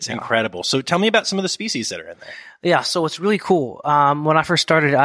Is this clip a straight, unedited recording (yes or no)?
yes